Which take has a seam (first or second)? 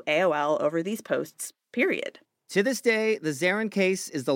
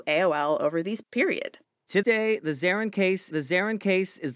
second